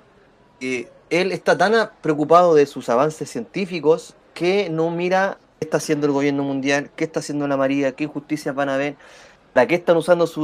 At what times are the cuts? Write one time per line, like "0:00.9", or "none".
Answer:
0:05.4